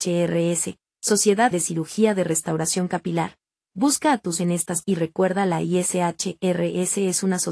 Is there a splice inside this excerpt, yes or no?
yes